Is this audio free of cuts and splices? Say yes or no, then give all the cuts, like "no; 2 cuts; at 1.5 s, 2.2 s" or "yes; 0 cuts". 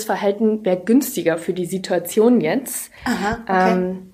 no; 1 cut; at 3.0 s